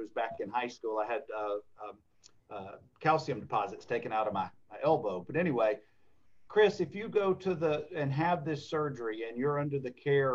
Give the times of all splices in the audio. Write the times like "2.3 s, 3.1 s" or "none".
none